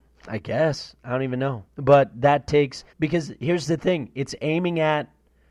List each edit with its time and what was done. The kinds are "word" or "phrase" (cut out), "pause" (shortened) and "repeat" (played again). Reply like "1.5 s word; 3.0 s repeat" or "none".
1.7 s pause; 2.9 s pause